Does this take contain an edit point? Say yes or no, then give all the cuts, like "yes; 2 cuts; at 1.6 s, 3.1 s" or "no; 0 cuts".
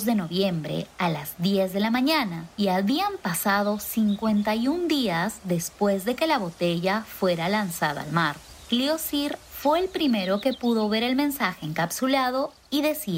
no; 0 cuts